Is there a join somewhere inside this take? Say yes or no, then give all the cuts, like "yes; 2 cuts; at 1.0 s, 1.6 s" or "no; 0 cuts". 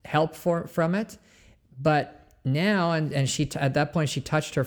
no; 0 cuts